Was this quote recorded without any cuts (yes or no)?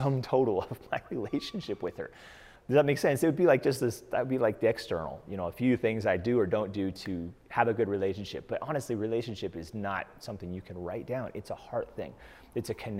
no